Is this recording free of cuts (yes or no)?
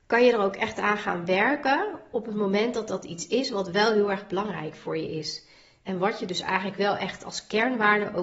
yes